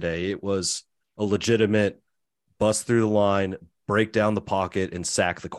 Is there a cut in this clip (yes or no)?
no